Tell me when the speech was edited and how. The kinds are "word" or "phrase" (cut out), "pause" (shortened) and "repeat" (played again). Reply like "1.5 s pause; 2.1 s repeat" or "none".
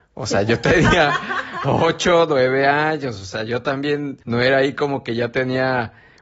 4.2 s pause